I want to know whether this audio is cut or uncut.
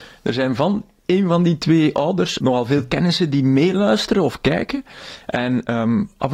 cut